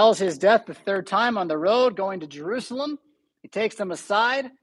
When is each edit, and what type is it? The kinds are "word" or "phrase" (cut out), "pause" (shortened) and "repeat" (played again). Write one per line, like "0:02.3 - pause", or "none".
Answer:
none